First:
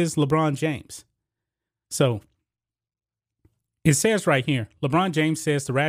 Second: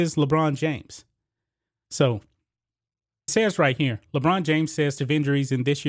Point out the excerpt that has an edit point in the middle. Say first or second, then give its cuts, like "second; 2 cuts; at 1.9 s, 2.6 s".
second; 2 cuts; at 3.3 s, 5.0 s